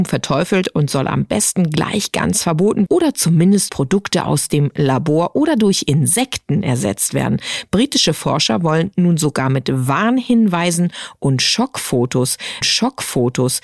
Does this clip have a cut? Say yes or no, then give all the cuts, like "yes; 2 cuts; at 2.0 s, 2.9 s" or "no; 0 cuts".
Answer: yes; 3 cuts; at 2.9 s, 3.7 s, 12.6 s